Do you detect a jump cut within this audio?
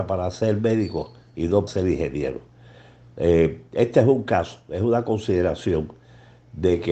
yes; 1 cut; at 1.7 s

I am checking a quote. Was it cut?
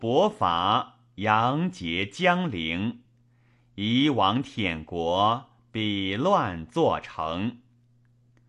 no; 0 cuts

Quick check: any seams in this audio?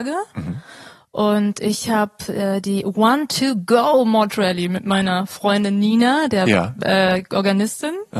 no; 0 cuts

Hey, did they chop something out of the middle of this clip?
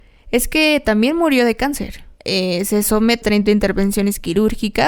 yes; 2 cuts; at 2.1 s, 3.2 s

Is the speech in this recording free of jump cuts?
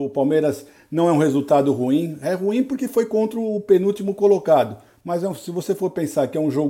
yes; 0 cuts

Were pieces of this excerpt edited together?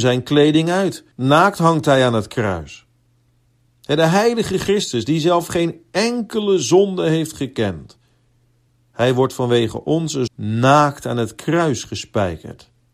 yes; 3 cuts; at 1.1 s, 8.7 s, 10.3 s

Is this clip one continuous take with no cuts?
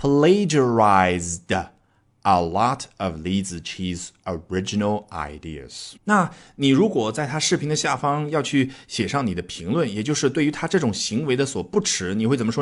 no; 1 cut; at 6.0 s

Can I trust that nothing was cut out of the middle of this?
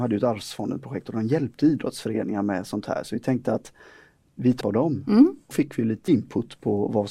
no; 3 cuts; at 4.6 s, 5.5 s, 6.1 s

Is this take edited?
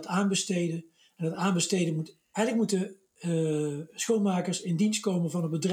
no; 0 cuts

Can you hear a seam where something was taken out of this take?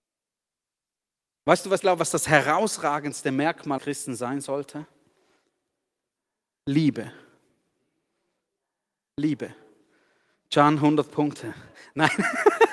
yes; 2 cuts; at 1.8 s, 3.8 s

